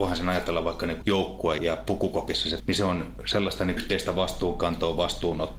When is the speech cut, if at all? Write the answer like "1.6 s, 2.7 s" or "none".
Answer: 1.0 s, 1.6 s, 2.6 s, 3.8 s